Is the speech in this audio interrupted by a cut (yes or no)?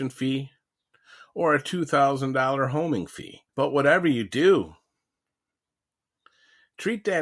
yes